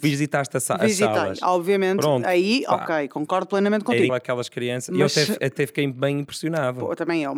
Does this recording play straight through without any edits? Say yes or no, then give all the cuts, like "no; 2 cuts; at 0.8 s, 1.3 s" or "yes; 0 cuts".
no; 1 cut; at 4.1 s